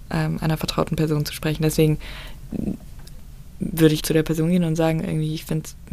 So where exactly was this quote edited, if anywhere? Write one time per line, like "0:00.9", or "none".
0:04.0